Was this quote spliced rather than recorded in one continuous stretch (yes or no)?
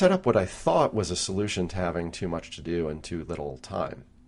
no